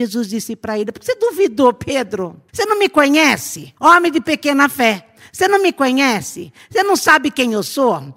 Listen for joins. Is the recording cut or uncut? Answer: cut